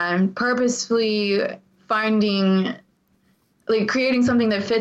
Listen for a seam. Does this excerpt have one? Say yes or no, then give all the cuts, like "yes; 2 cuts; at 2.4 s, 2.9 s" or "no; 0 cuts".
no; 0 cuts